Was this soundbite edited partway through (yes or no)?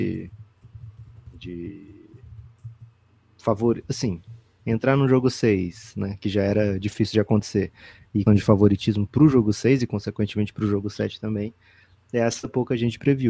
yes